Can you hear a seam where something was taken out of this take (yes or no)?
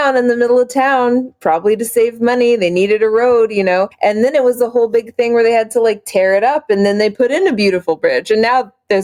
yes